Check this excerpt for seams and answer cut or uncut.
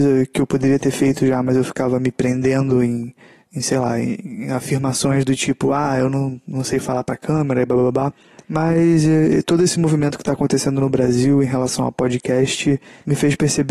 uncut